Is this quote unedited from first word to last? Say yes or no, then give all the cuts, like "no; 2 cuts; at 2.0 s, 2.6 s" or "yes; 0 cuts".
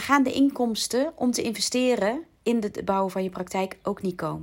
no; 1 cut; at 2.3 s